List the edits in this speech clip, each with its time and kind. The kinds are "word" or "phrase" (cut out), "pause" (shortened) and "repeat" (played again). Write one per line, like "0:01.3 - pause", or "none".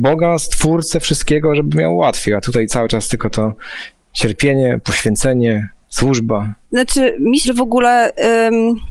0:06.6 - pause
0:07.4 - word